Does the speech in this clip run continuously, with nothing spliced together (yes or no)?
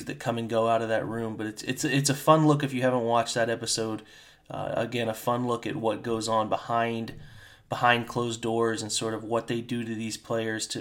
yes